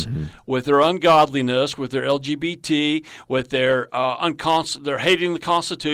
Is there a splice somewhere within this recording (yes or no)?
no